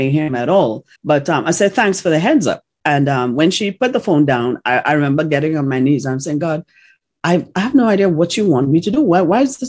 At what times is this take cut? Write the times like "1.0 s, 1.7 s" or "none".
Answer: 1.0 s